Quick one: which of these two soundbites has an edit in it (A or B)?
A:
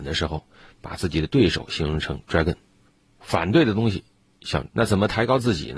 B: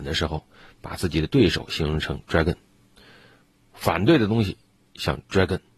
A